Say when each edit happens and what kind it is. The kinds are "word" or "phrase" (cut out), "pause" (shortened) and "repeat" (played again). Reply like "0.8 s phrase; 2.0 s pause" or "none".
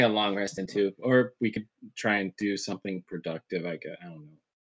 none